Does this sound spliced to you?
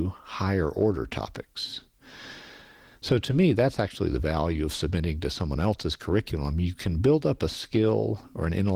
no; 0 cuts

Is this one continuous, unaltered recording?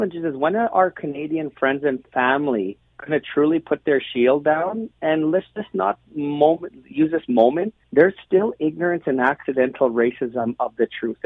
no; 2 cuts; at 2.9 s, 7.8 s

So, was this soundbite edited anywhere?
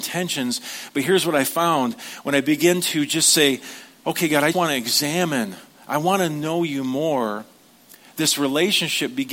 yes; 1 cut; at 4.5 s

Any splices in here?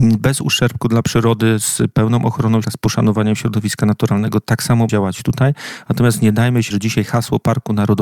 yes; 3 cuts; at 2.6 s, 4.9 s, 6.7 s

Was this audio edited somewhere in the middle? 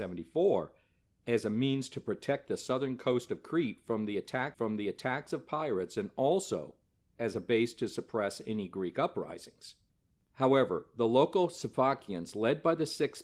yes; 1 cut; at 4.5 s

